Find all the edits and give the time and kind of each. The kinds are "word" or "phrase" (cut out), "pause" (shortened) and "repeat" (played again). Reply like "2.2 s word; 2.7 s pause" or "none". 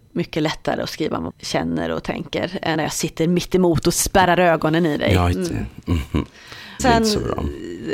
1.3 s word; 2.7 s word; 5.3 s word; 6.8 s word